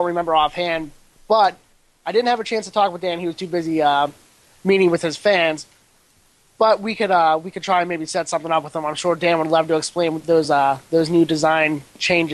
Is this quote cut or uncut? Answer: uncut